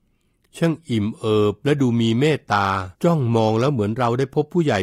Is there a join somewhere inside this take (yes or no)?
yes